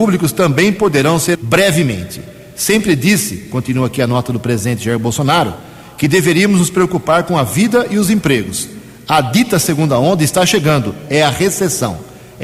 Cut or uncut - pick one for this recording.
cut